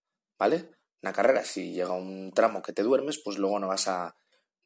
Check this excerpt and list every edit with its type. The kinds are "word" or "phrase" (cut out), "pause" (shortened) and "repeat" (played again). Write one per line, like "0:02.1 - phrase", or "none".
none

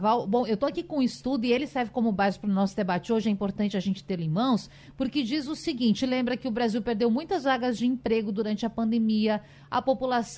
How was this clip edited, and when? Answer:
none

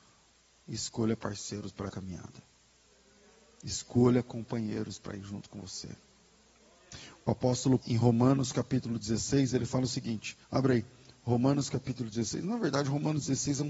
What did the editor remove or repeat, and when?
0:01.9 - word
0:07.8 - word
0:10.4 - pause

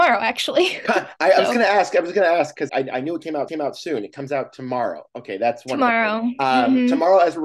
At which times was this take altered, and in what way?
0:02.7 - word
0:03.5 - repeat

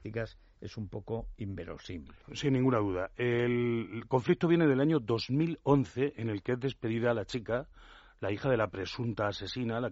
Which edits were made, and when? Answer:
0:02.2 - pause

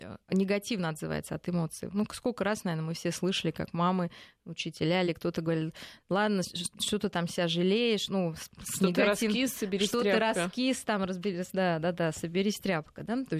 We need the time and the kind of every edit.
none

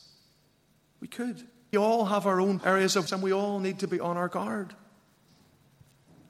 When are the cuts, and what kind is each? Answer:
0:01.7 - word
0:02.6 - word
0:03.1 - word

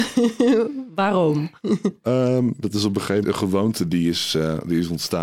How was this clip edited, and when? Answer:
0:01.6 - pause
0:02.6 - word
0:03.2 - word

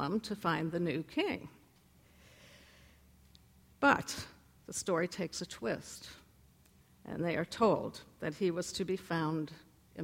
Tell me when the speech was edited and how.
none

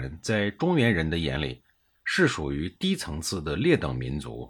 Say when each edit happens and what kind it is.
none

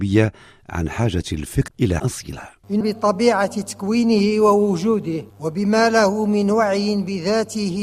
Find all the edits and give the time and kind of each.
0:01.7 - word
0:02.0 - word
0:02.8 - word
0:05.3 - pause

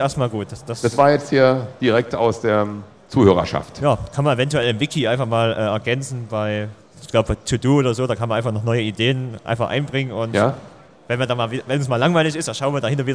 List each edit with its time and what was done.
none

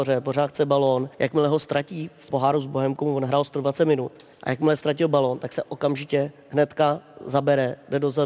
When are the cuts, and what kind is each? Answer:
0:01.1 - pause
0:02.3 - word
0:04.3 - pause

